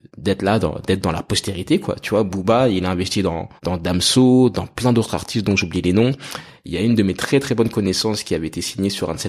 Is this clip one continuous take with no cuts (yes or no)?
no